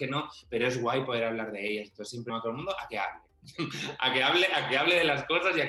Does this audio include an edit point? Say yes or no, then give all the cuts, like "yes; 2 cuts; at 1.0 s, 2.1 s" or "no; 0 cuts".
yes; 1 cut; at 2.3 s